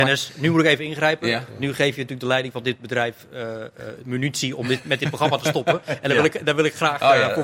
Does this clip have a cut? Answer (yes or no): no